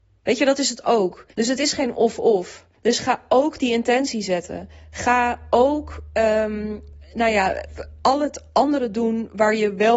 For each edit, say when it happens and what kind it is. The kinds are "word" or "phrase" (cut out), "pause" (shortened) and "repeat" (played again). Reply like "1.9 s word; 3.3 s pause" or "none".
1.3 s pause; 2.7 s pause; 7.0 s word